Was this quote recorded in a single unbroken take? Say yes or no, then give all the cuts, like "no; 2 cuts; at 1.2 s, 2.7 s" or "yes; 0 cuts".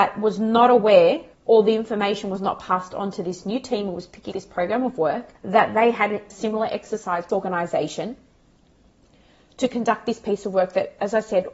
no; 5 cuts; at 1.3 s, 4.3 s, 5.4 s, 6.3 s, 7.3 s